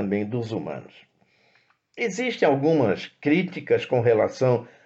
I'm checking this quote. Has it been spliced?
no; 0 cuts

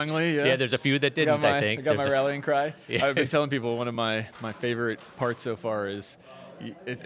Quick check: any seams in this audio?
no; 0 cuts

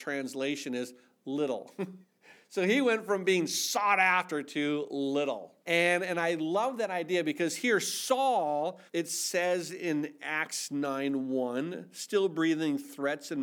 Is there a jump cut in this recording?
yes; 3 cuts; at 2.0 s, 5.6 s, 8.9 s

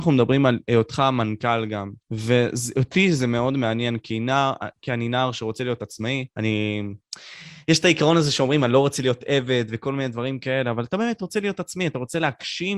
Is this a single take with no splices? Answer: no; 2 cuts; at 2.0 s, 6.3 s

